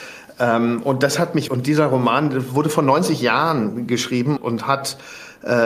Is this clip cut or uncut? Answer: cut